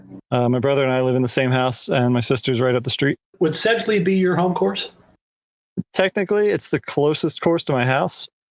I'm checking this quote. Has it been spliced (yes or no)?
yes